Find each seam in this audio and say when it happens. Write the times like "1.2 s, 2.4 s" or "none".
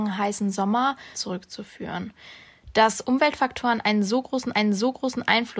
1.1 s, 4.5 s

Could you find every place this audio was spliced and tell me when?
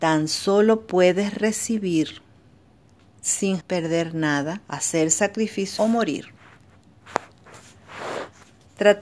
3.6 s, 4.6 s, 5.8 s

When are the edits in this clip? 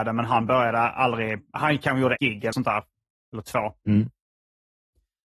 2.2 s, 2.5 s

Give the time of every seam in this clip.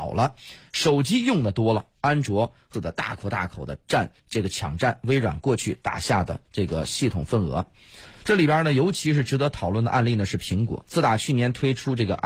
2.7 s, 4.2 s, 6.5 s

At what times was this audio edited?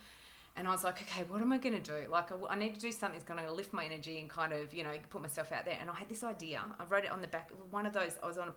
none

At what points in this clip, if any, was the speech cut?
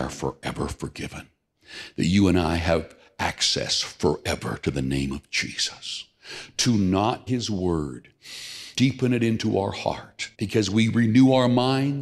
7.3 s, 8.7 s, 10.3 s

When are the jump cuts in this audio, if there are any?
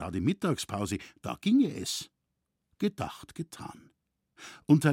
none

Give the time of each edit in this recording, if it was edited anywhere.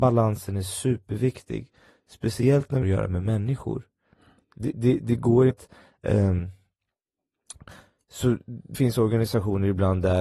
2.8 s, 4.7 s, 5.5 s, 8.7 s

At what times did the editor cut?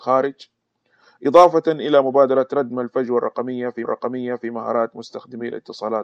3.8 s

